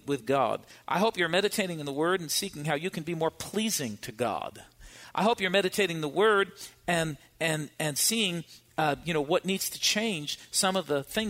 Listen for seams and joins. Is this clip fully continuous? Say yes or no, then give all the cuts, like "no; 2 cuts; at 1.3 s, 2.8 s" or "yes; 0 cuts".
yes; 0 cuts